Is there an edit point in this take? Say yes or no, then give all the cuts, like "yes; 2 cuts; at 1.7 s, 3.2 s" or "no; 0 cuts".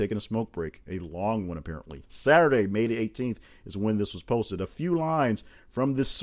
yes; 1 cut; at 1.0 s